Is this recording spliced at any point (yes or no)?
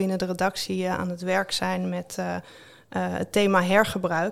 no